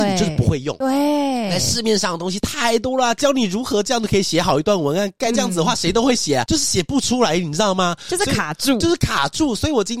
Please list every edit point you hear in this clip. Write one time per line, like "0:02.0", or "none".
0:05.3